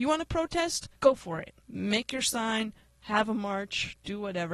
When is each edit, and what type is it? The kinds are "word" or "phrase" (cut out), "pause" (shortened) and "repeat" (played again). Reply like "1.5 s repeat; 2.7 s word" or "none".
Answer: 1.0 s pause; 1.6 s pause

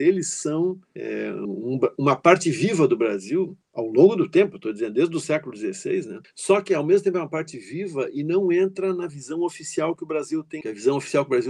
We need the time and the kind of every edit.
3.6 s pause

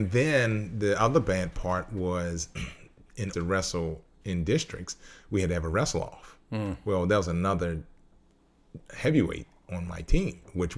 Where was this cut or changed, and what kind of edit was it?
3.3 s phrase

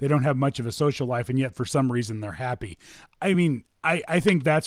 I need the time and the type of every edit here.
none

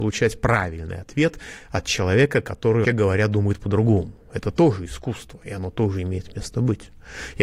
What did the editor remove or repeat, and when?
2.8 s word

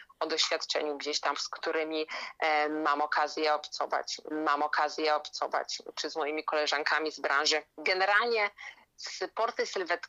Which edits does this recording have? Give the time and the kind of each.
1.3 s word; 4.3 s repeat

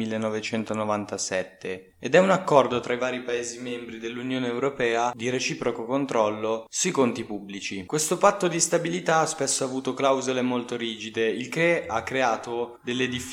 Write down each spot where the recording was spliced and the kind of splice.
none

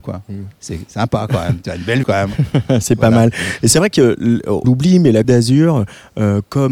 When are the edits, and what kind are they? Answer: 2.0 s word; 4.6 s word; 5.2 s word

